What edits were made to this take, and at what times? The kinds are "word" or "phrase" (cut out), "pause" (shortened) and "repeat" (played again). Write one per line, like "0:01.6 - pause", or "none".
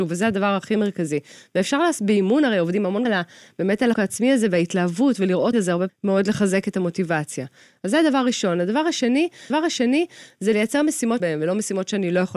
0:03.0 - word
0:03.9 - word
0:05.5 - phrase
0:05.9 - phrase
0:09.5 - repeat
0:11.2 - phrase